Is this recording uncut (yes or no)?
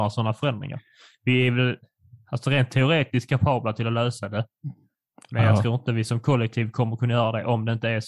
yes